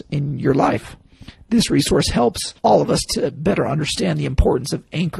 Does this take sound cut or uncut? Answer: cut